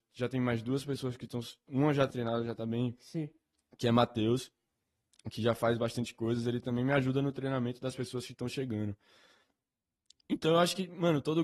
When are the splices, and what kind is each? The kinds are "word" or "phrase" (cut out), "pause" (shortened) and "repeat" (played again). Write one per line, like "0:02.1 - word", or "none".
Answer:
0:02.1 - word